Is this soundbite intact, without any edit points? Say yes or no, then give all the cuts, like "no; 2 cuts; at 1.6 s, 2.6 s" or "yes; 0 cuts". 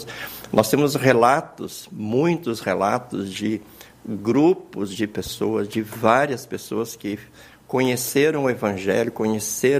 yes; 0 cuts